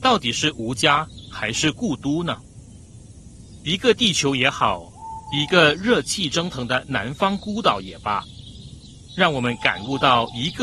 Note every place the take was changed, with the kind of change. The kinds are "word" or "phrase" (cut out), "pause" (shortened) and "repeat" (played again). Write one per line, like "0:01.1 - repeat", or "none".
0:09.1 - phrase